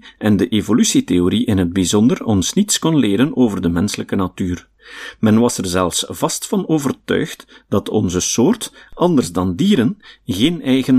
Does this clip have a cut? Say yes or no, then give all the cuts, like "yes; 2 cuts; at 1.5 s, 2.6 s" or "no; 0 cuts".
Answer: no; 0 cuts